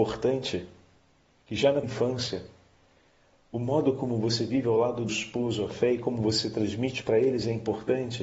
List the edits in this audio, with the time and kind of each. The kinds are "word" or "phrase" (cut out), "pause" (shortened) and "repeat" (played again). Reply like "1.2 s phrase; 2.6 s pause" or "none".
1.8 s word; 5.1 s word